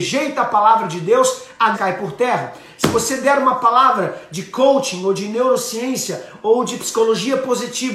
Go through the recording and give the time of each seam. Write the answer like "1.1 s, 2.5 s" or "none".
1.7 s